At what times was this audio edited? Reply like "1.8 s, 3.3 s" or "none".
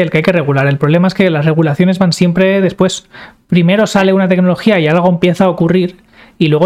none